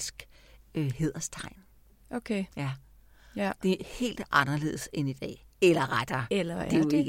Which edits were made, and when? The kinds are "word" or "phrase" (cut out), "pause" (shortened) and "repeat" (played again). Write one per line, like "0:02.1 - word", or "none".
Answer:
0:02.5 - pause
0:05.5 - pause